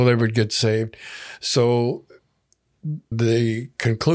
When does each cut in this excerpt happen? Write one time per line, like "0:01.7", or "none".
0:03.1